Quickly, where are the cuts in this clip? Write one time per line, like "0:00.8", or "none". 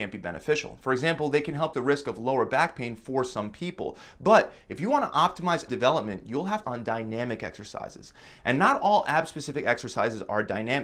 0:01.7
0:05.7
0:06.6